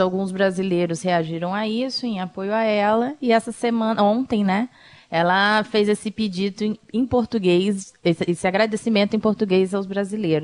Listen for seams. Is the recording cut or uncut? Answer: uncut